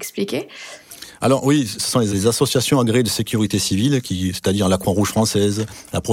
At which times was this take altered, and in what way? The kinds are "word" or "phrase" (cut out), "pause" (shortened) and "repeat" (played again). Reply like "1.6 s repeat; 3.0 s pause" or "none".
none

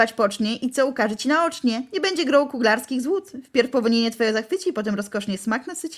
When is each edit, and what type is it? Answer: none

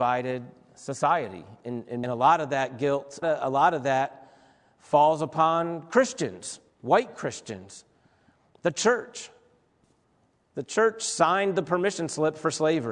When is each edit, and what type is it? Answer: 2.0 s phrase; 3.2 s phrase; 6.7 s pause

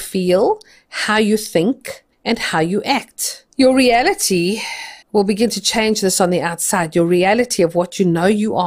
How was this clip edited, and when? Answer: 2.1 s pause; 3.5 s pause; 5.0 s pause

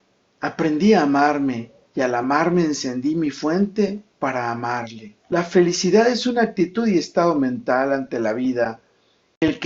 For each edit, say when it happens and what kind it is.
1.8 s pause; 4.1 s pause; 5.2 s pause

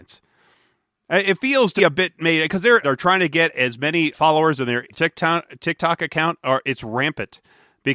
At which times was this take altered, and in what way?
1.8 s word; 2.8 s phrase; 4.1 s word; 4.9 s word

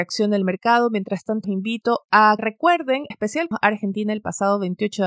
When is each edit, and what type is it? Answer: 1.4 s word; 2.4 s word; 3.1 s word; 3.5 s word

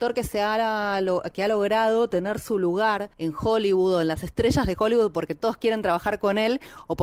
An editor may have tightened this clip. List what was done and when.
3.1 s pause

